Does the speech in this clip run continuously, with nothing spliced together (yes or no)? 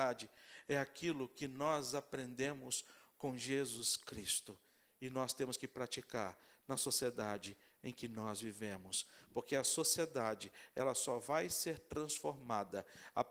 yes